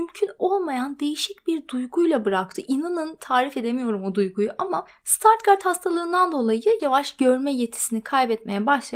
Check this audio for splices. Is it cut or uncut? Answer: cut